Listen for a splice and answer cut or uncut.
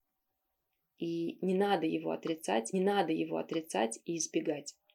cut